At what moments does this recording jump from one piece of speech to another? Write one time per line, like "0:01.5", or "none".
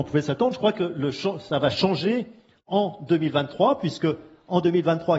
none

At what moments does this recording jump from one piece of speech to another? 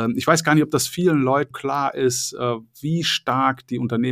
0:01.5

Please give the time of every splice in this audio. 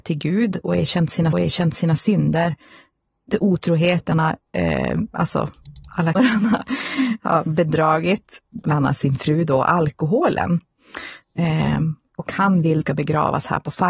0:01.3
0:04.1
0:04.5
0:06.1
0:12.8

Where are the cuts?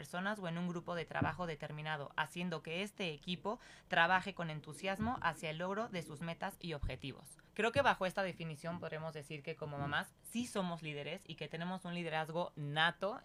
0:07.5

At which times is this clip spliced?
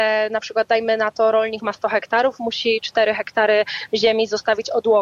none

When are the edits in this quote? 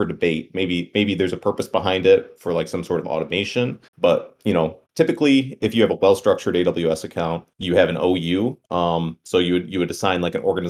0:03.9
0:04.9
0:07.5
0:08.6

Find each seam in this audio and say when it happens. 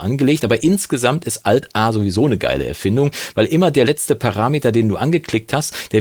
none

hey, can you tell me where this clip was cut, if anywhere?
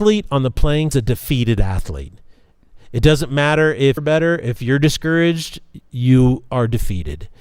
0:00.9
0:04.0

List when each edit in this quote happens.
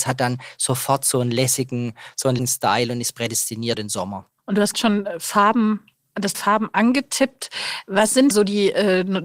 0:02.4
0:03.7
0:04.7
0:06.3
0:08.3

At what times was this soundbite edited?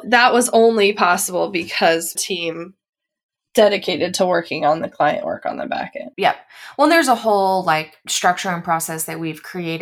0:02.2
0:06.1

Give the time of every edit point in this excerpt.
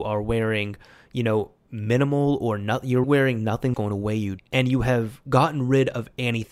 0:03.0
0:03.7
0:04.4

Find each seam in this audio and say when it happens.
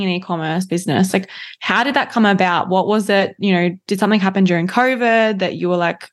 none

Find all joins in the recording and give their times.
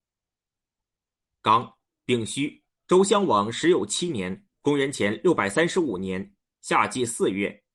none

